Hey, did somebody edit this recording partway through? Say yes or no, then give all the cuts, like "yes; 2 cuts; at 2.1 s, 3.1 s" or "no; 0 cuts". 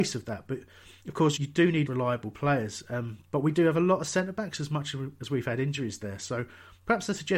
yes; 3 cuts; at 1.0 s, 1.4 s, 1.9 s